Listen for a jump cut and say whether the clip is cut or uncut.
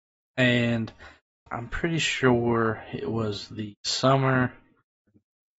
cut